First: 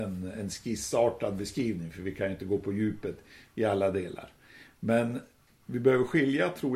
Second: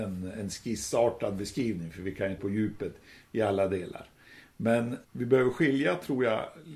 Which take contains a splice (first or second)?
second